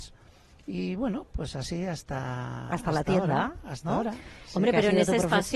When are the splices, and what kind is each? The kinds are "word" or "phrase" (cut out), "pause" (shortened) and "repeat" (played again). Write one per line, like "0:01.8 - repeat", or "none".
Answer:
none